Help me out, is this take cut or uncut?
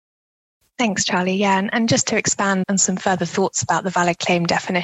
cut